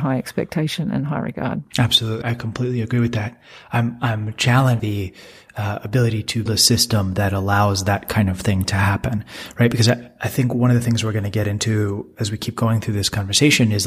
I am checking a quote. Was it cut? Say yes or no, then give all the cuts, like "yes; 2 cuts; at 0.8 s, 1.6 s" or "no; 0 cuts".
yes; 3 cuts; at 2.2 s, 4.8 s, 6.5 s